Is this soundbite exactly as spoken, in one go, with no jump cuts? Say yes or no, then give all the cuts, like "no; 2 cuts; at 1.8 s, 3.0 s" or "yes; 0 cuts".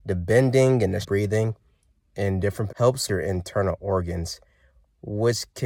no; 3 cuts; at 1.0 s, 2.7 s, 3.1 s